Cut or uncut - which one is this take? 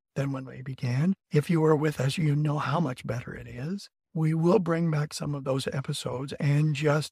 cut